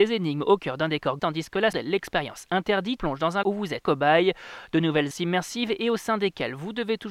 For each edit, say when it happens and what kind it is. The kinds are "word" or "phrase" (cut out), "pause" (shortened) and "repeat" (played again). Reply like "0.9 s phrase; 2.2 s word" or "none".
1.2 s word; 1.7 s word; 3.0 s word; 3.4 s word; 3.8 s word; 5.1 s word